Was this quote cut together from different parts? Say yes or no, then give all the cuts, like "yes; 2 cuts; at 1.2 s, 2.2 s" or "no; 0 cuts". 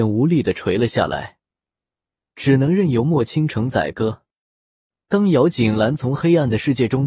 no; 0 cuts